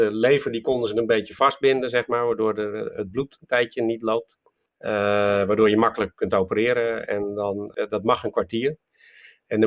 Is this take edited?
yes; 1 cut; at 4.7 s

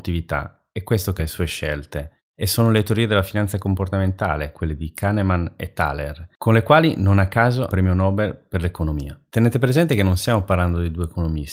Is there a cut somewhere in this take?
yes; 3 cuts; at 1.2 s, 2.3 s, 7.7 s

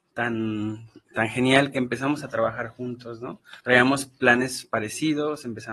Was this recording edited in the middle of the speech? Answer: yes; 1 cut; at 3.6 s

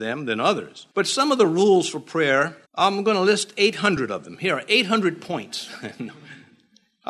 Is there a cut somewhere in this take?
yes; 2 cuts; at 0.9 s, 2.6 s

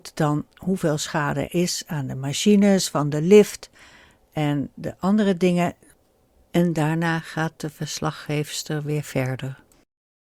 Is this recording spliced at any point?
yes; 1 cut; at 1.5 s

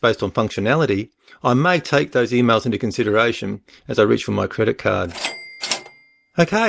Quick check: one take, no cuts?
yes; 0 cuts

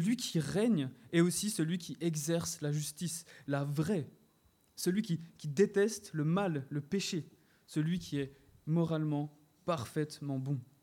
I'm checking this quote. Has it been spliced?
no; 0 cuts

